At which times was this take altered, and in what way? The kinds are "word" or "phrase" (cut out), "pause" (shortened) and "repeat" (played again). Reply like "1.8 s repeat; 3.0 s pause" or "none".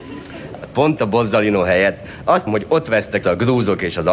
1.0 s word; 2.5 s word; 3.2 s word